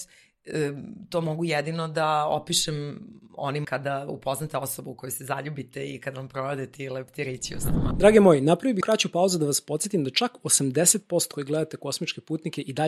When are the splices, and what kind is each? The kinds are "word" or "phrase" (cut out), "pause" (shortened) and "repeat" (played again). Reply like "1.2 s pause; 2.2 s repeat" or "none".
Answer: 3.6 s word; 8.8 s word; 11.3 s word